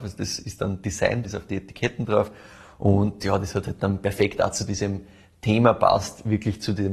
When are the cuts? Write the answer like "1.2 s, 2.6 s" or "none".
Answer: 1.2 s